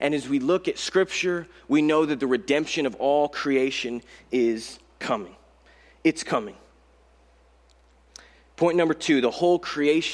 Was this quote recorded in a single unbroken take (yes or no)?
yes